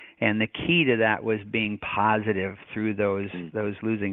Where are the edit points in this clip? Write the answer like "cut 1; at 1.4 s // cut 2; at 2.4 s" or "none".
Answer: none

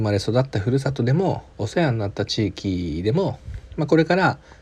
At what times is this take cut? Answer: cut 1; at 1.5 s

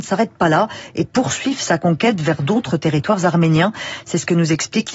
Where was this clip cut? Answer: none

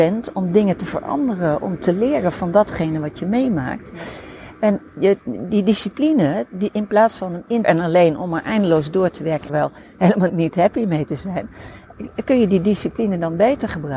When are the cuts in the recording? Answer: cut 1; at 7.6 s // cut 2; at 9.5 s // cut 3; at 10.3 s

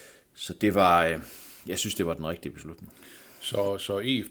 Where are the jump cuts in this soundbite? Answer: none

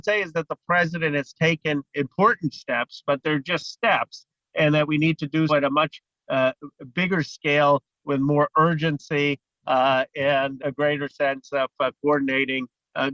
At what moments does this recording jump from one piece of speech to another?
cut 1; at 1.9 s // cut 2; at 5.5 s // cut 3; at 10.6 s

